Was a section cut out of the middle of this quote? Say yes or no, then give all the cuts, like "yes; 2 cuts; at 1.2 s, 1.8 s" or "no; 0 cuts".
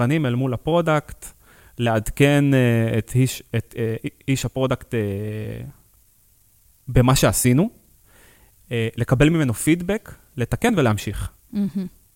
no; 0 cuts